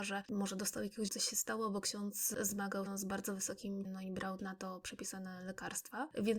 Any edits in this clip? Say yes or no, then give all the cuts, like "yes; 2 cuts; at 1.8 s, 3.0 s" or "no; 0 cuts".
yes; 4 cuts; at 1.1 s, 2.9 s, 3.8 s, 4.4 s